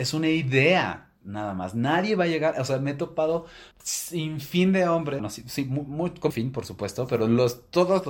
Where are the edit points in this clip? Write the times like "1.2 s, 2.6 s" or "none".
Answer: 3.7 s, 5.2 s, 6.3 s